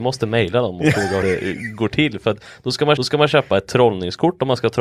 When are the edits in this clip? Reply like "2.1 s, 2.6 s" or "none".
1.2 s, 3.0 s